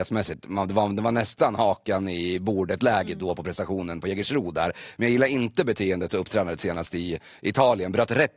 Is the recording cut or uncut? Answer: uncut